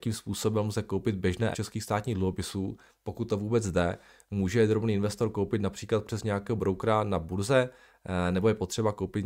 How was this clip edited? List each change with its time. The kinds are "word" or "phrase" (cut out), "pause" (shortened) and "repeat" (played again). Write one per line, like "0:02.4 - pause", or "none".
0:01.5 - word